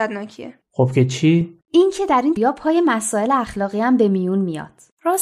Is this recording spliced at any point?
yes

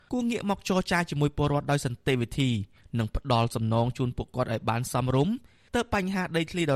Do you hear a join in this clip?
no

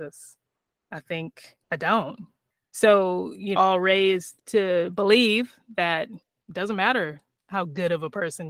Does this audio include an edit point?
yes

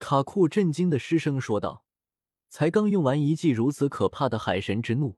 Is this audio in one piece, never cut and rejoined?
yes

